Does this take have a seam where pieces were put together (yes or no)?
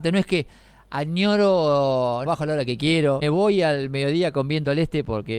yes